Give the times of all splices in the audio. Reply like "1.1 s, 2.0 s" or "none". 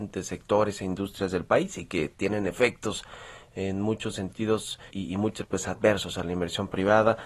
4.9 s, 5.4 s